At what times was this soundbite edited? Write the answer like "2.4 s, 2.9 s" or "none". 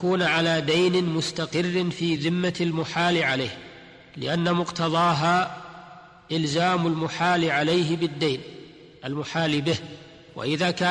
none

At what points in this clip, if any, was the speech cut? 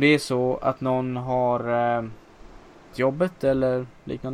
2.9 s

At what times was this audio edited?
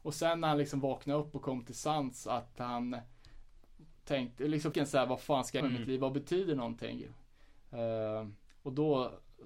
4.7 s, 5.6 s, 8.5 s

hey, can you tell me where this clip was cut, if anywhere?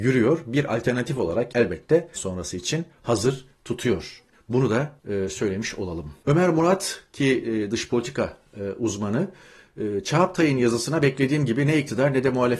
1.5 s, 2.2 s, 4.3 s, 5.0 s, 6.2 s

